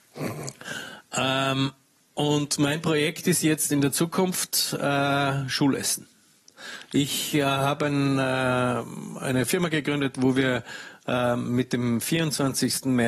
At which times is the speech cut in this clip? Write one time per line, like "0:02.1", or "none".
0:02.0